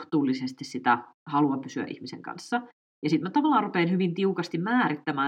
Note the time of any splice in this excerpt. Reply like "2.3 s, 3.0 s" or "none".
none